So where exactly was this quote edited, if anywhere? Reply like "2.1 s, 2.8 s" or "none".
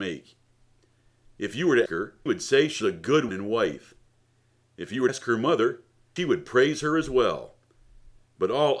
1.9 s, 2.3 s, 2.8 s, 3.3 s, 5.1 s, 6.2 s